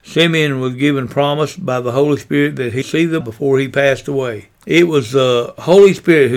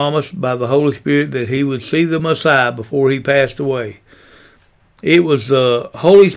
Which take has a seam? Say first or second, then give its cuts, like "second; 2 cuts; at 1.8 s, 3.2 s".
first; 3 cuts; at 2.8 s, 3.2 s, 4.5 s